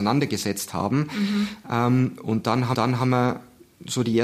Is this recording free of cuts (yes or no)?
no